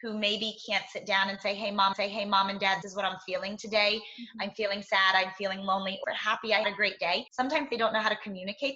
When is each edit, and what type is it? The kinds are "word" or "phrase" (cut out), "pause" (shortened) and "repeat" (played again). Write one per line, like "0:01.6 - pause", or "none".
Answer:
0:01.9 - repeat
0:02.8 - word
0:06.0 - phrase
0:06.6 - word
0:07.3 - pause